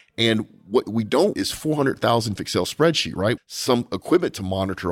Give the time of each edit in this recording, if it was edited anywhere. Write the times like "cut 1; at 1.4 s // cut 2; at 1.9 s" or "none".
cut 1; at 1.3 s // cut 2; at 2.4 s // cut 3; at 3.4 s